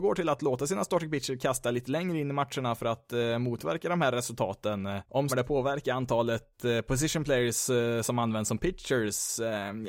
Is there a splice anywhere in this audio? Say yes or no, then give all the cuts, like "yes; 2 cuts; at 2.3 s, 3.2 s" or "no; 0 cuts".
yes; 1 cut; at 5.3 s